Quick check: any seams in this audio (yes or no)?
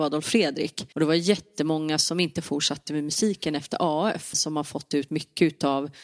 yes